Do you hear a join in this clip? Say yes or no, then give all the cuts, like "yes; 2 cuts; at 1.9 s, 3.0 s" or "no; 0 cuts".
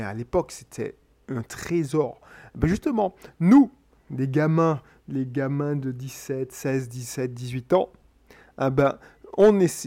no; 0 cuts